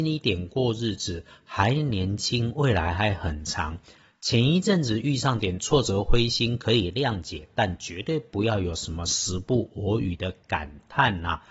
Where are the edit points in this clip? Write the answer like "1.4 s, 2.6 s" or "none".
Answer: none

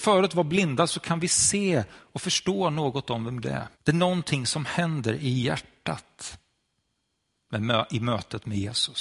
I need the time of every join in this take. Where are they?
3.4 s, 3.7 s

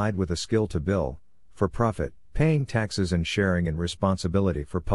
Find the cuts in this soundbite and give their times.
2.2 s

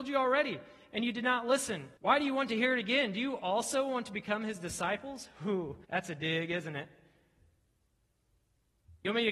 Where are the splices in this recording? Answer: 2.0 s, 5.8 s

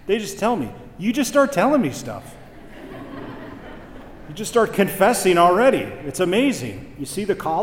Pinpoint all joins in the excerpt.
none

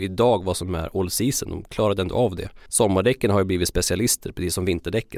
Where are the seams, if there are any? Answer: 2.7 s

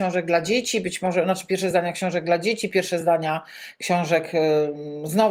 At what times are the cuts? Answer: none

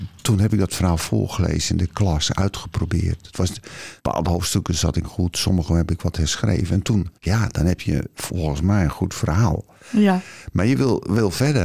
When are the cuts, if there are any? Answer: 4.0 s, 5.0 s, 7.2 s

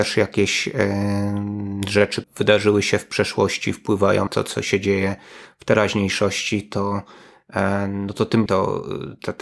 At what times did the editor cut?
2.2 s, 4.3 s, 8.5 s

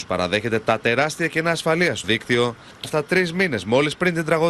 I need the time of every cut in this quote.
2.0 s, 2.8 s

